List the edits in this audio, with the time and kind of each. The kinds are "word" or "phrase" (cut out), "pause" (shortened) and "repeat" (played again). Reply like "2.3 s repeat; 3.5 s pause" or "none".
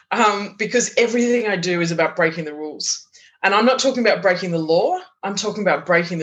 none